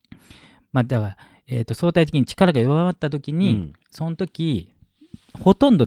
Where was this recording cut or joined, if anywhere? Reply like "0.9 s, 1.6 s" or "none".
3.8 s